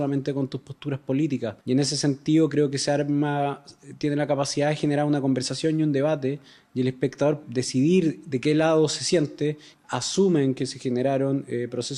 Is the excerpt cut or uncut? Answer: cut